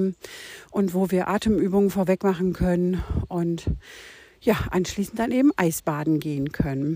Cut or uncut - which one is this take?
uncut